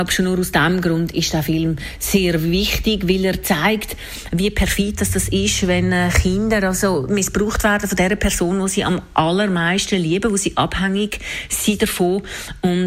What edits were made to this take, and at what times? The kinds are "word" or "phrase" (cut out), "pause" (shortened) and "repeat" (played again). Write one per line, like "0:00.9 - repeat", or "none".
none